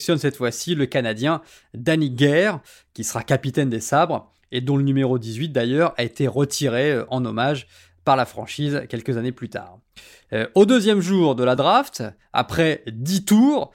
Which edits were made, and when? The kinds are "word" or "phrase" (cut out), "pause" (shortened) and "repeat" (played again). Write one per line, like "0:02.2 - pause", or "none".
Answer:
none